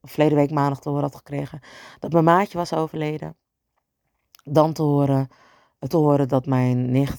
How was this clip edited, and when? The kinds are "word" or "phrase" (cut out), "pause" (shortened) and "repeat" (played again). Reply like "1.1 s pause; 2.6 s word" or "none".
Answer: 5.9 s word